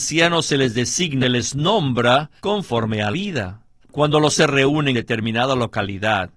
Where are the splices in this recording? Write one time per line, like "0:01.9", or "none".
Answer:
0:01.2
0:02.4
0:03.1
0:03.8
0:04.3
0:04.9